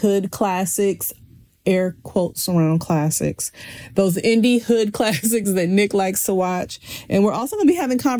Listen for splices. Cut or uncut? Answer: uncut